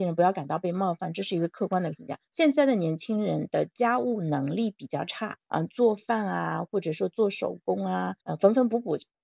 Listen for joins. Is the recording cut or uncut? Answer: cut